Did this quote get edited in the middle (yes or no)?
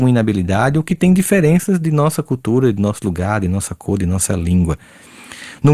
no